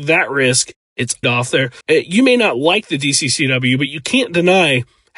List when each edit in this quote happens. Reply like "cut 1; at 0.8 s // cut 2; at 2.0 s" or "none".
cut 1; at 1.2 s // cut 2; at 1.8 s

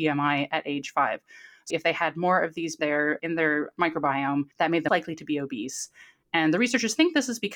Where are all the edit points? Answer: cut 1; at 1.7 s // cut 2; at 2.8 s // cut 3; at 3.2 s // cut 4; at 4.5 s // cut 5; at 4.9 s

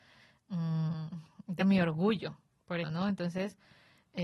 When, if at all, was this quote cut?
cut 1; at 1.6 s // cut 2; at 2.8 s

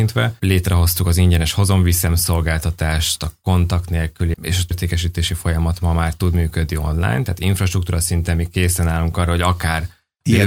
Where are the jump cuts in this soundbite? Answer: cut 1; at 4.3 s // cut 2; at 4.7 s

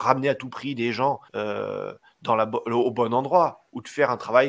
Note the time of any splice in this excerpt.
cut 1; at 1.3 s

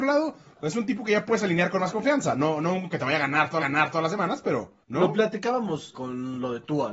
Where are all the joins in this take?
cut 1; at 2.9 s // cut 2; at 3.6 s // cut 3; at 4.8 s // cut 4; at 5.9 s

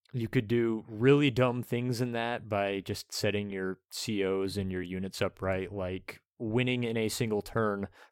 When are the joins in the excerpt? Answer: none

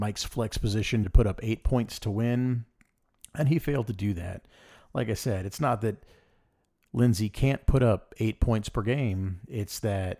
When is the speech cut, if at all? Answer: cut 1; at 1.0 s

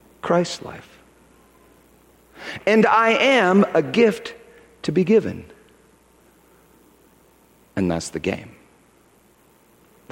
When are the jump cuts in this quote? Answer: none

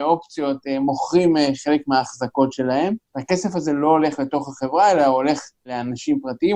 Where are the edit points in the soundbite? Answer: cut 1; at 3.1 s

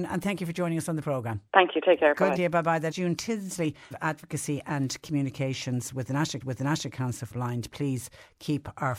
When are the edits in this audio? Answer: cut 1; at 1.5 s // cut 2; at 2.4 s // cut 3; at 2.9 s // cut 4; at 3.9 s // cut 5; at 6.4 s // cut 6; at 7.3 s

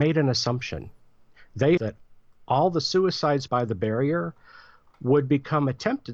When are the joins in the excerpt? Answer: cut 1; at 1.8 s // cut 2; at 3.5 s

